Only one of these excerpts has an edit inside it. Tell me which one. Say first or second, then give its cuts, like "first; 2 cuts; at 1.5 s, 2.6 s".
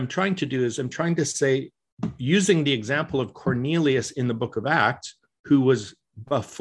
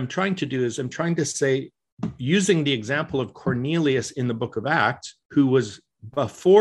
second; 1 cut; at 5.2 s